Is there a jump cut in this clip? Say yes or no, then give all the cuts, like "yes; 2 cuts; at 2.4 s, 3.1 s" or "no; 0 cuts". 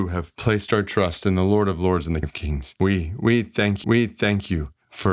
yes; 2 cuts; at 2.2 s, 3.8 s